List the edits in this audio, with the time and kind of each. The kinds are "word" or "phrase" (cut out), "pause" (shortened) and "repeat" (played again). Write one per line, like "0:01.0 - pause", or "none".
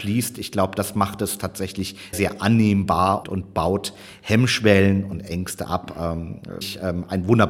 0:02.1 - word
0:03.2 - word
0:06.6 - word